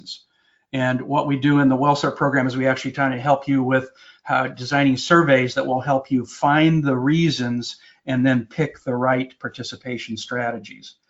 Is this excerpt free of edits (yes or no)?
yes